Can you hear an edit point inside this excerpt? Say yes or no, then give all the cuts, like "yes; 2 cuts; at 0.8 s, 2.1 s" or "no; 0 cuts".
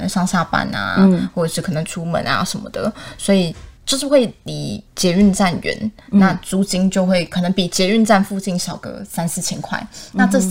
yes; 2 cuts; at 3.8 s, 6.0 s